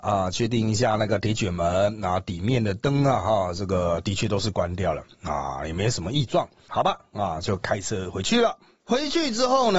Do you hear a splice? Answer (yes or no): no